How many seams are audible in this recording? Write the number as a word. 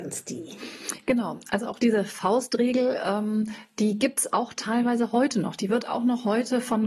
zero